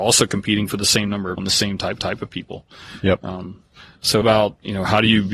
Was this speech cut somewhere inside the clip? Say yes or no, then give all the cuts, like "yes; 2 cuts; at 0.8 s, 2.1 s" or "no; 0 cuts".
yes; 3 cuts; at 1.4 s, 2.0 s, 4.2 s